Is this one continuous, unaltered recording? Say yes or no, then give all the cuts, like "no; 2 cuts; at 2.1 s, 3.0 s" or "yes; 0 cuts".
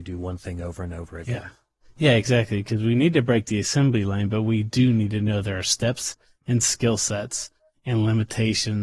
yes; 0 cuts